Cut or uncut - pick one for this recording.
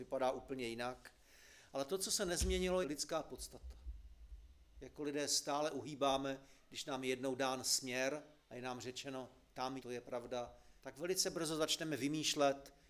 cut